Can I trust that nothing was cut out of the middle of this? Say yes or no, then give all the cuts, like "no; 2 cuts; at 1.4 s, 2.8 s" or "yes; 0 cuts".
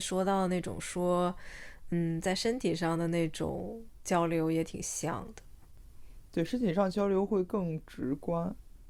yes; 0 cuts